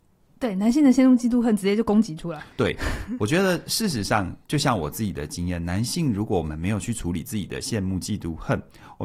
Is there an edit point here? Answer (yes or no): yes